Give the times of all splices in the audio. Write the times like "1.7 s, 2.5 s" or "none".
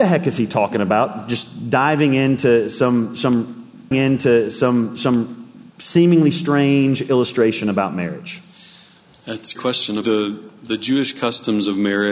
3.9 s, 9.6 s, 10.0 s